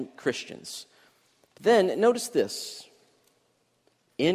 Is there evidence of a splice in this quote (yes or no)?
no